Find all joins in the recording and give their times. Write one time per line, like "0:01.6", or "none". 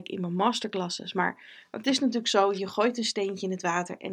none